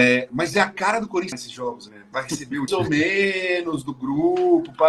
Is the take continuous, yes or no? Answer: no